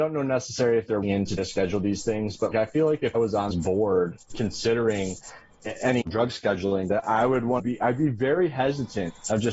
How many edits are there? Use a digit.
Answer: 8